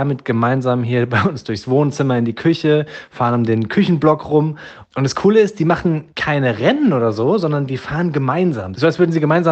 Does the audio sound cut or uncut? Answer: cut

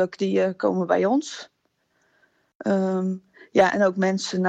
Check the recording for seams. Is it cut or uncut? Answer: uncut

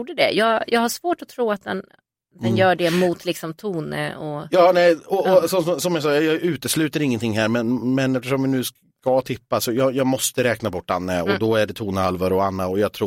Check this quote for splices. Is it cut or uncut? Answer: uncut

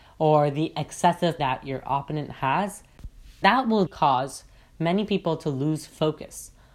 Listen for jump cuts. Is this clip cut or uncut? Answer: cut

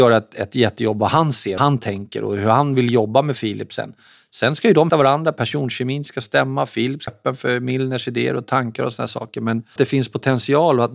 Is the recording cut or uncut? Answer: cut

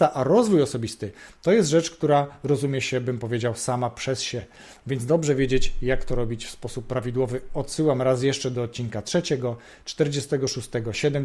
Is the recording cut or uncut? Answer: uncut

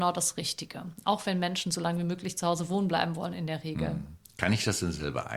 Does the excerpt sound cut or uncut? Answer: uncut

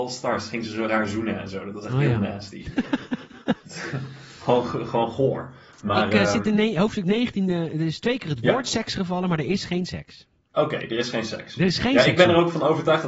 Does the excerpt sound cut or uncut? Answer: uncut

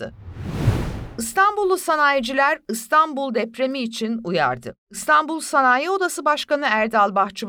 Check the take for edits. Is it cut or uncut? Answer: uncut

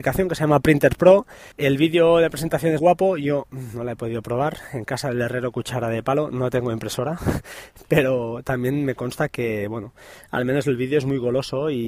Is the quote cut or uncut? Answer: cut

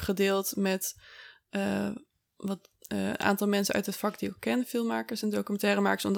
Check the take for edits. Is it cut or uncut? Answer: uncut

